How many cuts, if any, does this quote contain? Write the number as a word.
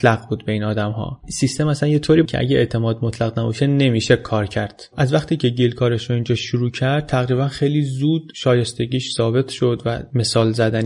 one